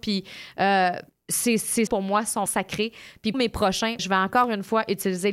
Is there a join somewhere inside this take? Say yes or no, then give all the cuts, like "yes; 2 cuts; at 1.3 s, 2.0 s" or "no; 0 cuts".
yes; 5 cuts; at 1.1 s, 1.9 s, 2.5 s, 3.3 s, 4.0 s